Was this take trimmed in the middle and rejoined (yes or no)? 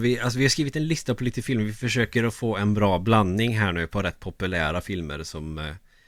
no